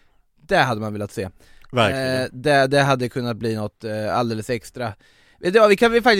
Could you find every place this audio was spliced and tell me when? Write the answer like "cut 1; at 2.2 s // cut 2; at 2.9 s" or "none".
none

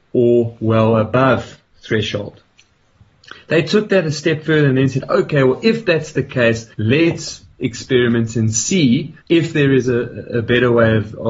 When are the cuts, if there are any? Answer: cut 1; at 1.7 s // cut 2; at 6.7 s // cut 3; at 9.2 s

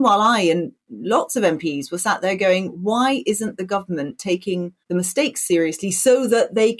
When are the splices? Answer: cut 1; at 4.8 s

